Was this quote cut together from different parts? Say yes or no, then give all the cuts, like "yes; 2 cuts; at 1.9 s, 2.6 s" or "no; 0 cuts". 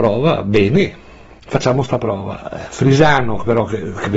no; 0 cuts